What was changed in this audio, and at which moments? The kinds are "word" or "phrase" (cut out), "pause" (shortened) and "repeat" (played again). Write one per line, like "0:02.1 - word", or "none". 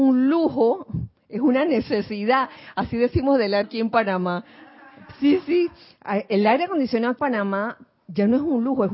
0:03.6 - word
0:07.2 - word